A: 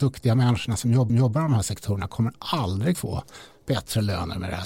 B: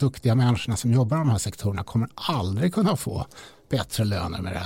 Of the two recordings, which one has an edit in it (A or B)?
A